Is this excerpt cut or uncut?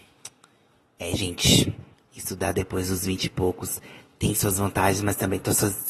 cut